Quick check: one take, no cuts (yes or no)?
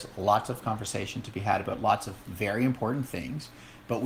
yes